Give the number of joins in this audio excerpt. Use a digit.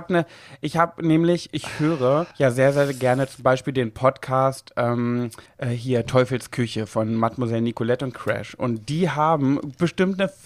3